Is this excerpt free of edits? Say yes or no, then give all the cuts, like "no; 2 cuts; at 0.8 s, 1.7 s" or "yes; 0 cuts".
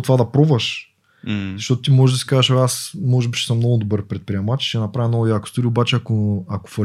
yes; 0 cuts